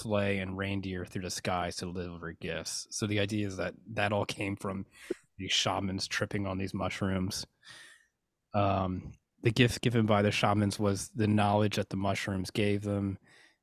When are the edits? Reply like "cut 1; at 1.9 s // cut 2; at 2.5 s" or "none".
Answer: none